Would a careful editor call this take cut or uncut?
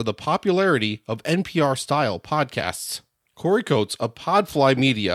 cut